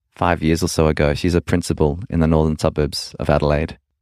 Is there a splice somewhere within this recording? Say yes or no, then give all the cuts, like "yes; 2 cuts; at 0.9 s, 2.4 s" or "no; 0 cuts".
no; 0 cuts